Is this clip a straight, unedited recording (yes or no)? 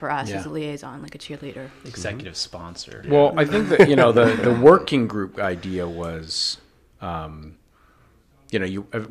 yes